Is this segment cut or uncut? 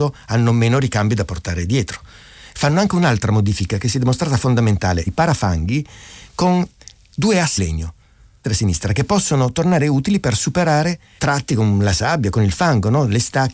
cut